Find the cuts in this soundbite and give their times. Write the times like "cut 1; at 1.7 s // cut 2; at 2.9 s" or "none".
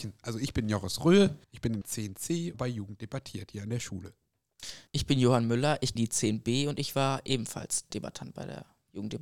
cut 1; at 1.4 s // cut 2; at 1.8 s // cut 3; at 2.5 s // cut 4; at 4.9 s // cut 5; at 6.0 s // cut 6; at 7.9 s